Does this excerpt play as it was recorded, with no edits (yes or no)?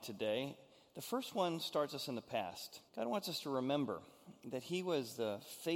no